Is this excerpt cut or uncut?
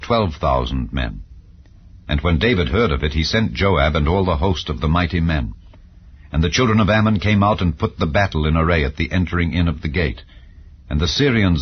uncut